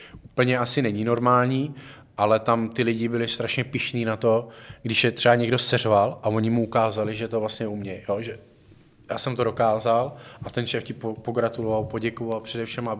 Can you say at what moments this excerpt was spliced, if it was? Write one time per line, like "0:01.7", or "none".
none